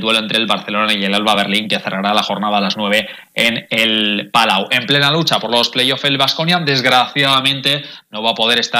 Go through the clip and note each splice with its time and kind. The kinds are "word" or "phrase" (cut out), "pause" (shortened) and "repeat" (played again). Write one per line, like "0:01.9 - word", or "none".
none

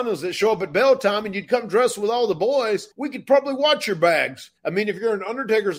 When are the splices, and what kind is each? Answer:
0:02.9 - pause
0:04.6 - pause

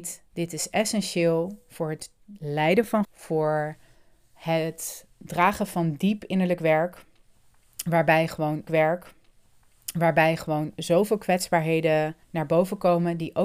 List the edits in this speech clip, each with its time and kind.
0:03.0 - word
0:08.7 - repeat
0:12.2 - pause

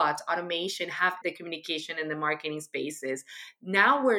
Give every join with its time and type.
0:01.2 - word

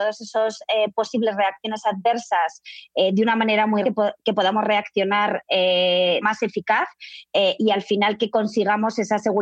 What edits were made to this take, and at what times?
0:03.8 - word
0:06.2 - phrase

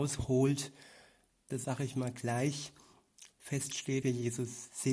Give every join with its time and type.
0:01.6 - word
0:04.0 - word

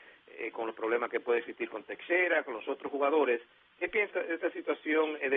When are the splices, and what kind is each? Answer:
0:04.1 - word

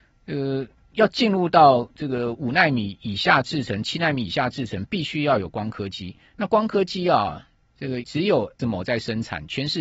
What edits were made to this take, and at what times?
0:08.0 - word
0:08.6 - word

